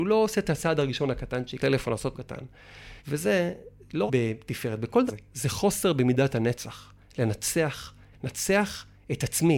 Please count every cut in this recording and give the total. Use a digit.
6